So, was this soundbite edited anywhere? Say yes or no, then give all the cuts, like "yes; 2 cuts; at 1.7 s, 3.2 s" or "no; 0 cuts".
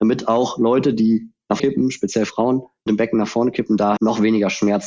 yes; 3 cuts; at 1.6 s, 2.9 s, 4.0 s